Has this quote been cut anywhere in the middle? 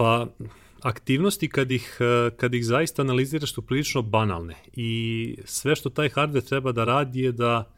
no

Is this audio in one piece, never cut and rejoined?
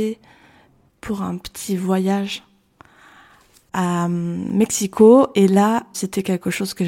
yes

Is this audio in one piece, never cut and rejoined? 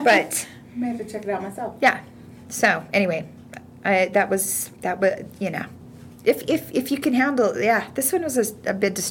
no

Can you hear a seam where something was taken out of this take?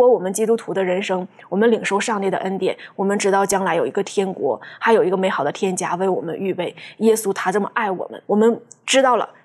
yes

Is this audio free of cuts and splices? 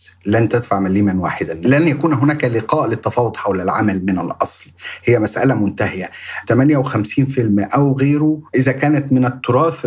no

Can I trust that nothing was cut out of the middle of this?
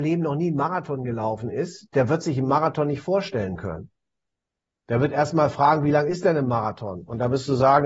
yes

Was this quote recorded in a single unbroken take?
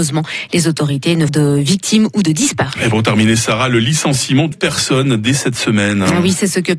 no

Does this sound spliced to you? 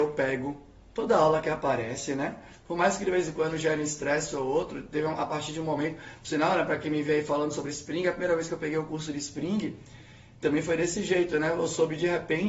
no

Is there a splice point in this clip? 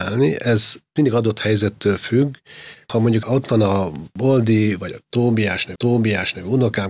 yes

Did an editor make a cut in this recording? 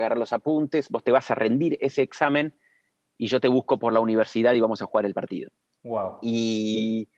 no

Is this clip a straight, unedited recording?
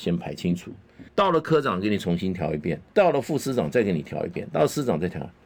no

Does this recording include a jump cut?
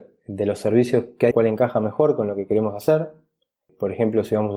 yes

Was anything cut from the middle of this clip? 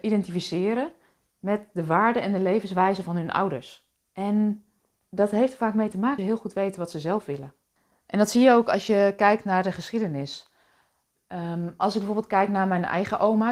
yes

